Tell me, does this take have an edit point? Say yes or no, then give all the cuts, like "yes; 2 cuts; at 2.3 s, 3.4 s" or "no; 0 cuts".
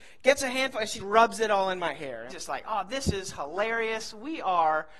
yes; 2 cuts; at 1.0 s, 2.3 s